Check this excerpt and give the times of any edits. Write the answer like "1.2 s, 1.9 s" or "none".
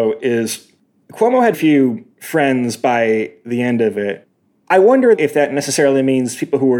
1.5 s